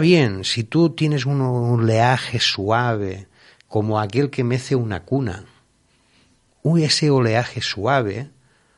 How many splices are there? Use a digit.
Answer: 0